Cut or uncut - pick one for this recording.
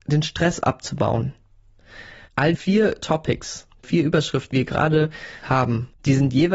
cut